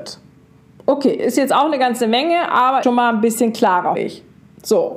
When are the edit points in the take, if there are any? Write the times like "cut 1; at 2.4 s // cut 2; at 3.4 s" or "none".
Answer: cut 1; at 2.8 s // cut 2; at 3.9 s